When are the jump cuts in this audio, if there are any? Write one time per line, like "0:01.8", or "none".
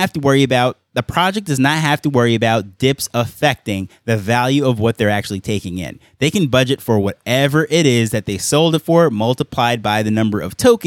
none